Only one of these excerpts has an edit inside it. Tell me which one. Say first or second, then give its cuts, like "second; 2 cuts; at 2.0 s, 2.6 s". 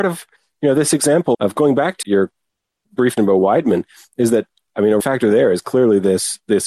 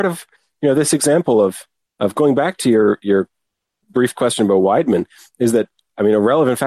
first; 4 cuts; at 1.3 s, 2.0 s, 3.2 s, 5.0 s